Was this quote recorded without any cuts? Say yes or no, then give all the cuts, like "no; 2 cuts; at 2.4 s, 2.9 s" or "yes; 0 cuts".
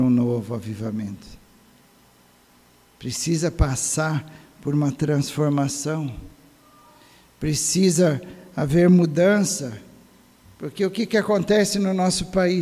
yes; 0 cuts